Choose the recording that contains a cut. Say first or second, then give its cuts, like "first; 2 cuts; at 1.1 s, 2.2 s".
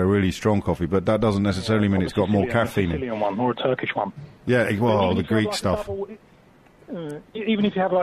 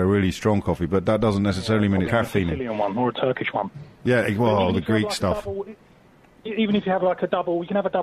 second; 2 cuts; at 2.1 s, 6.4 s